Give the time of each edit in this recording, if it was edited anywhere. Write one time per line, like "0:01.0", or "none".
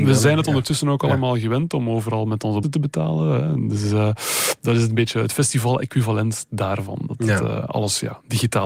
0:02.6